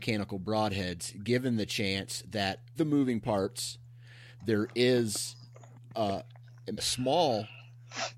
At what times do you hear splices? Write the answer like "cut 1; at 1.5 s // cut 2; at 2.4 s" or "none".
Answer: cut 1; at 2.8 s // cut 2; at 6.8 s